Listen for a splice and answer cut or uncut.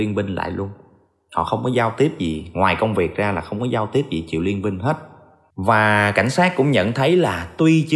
uncut